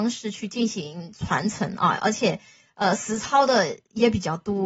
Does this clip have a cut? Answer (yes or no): no